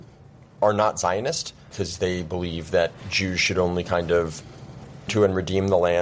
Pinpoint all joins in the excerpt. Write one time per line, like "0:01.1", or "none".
0:05.1